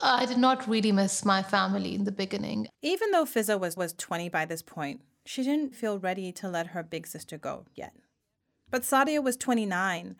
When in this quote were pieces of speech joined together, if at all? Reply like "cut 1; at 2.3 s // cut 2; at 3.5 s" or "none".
cut 1; at 2.7 s // cut 2; at 3.8 s // cut 3; at 5.7 s // cut 4; at 7.8 s